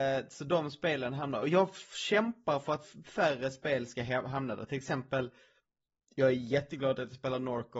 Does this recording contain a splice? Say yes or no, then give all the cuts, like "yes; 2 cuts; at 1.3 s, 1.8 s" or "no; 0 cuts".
no; 0 cuts